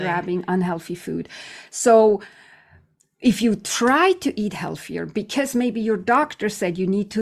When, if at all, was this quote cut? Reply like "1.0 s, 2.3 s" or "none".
none